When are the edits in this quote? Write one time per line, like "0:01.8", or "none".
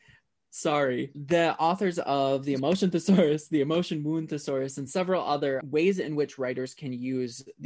none